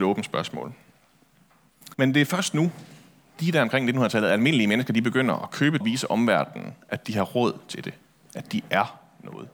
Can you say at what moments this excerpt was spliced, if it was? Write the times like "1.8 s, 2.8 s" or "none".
1.9 s, 5.8 s